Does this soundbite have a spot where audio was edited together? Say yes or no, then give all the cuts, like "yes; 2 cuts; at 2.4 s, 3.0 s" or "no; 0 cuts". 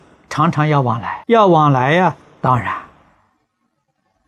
yes; 1 cut; at 1.2 s